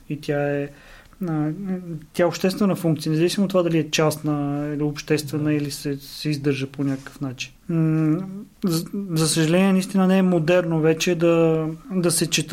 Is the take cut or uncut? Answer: cut